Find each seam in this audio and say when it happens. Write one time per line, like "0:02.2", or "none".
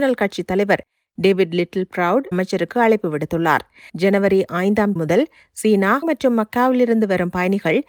0:02.3
0:03.9
0:05.0
0:06.0